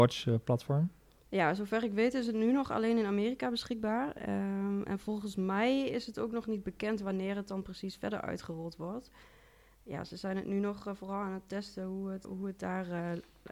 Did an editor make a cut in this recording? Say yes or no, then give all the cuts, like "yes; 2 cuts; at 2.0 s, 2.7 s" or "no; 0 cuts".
yes; 1 cut; at 12.2 s